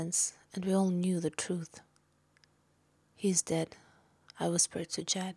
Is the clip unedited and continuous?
yes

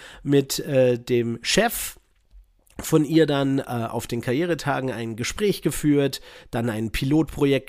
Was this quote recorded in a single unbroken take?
yes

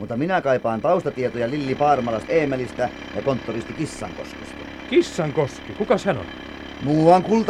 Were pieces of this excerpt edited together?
yes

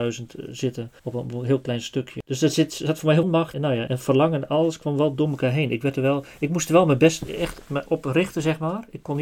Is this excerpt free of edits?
no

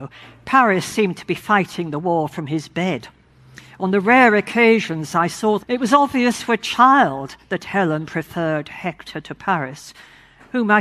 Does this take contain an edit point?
yes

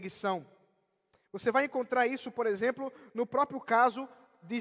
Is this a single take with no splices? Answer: yes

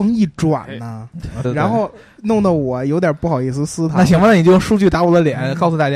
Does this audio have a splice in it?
yes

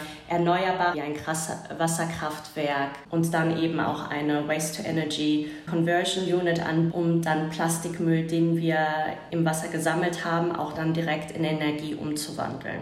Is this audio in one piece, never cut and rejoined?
no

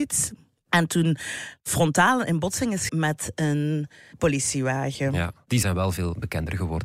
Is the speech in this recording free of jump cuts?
no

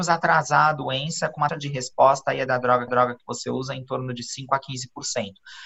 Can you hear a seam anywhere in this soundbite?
yes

